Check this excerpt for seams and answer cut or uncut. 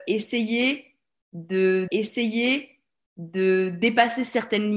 cut